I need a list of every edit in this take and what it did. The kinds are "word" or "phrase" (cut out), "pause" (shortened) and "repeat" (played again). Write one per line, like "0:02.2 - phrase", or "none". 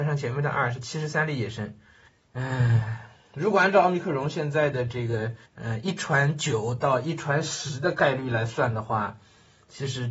0:02.1 - pause
0:05.5 - pause